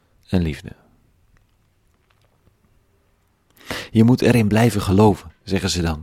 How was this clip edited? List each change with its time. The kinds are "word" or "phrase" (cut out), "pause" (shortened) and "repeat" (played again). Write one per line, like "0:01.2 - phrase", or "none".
none